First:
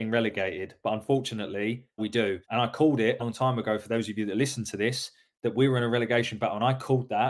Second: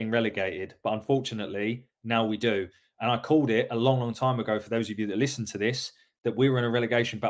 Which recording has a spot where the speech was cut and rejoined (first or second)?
first